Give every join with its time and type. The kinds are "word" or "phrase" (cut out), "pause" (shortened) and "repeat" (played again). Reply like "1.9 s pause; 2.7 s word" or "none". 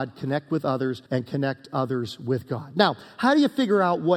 1.1 s pause

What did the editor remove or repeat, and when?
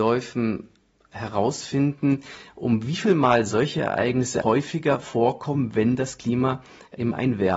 4.4 s word

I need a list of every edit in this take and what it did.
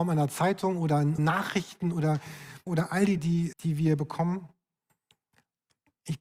1.2 s word; 2.7 s word; 3.2 s word; 3.5 s word

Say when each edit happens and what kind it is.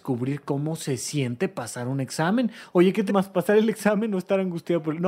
3.1 s word

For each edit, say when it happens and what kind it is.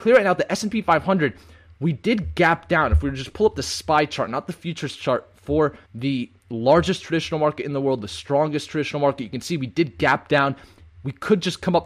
5.8 s pause

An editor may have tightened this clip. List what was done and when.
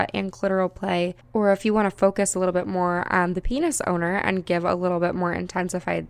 none

